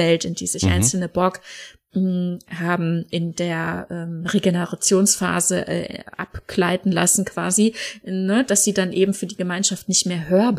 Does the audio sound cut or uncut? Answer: uncut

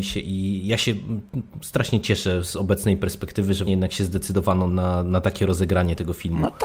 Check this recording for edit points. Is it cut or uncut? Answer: cut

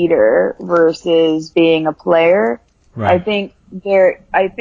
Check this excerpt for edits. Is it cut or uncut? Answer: cut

